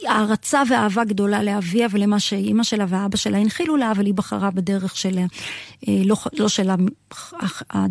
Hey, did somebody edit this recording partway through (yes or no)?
no